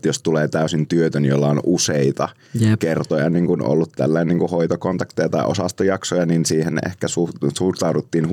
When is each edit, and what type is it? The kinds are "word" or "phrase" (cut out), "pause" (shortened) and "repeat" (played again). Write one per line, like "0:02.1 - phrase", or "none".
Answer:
none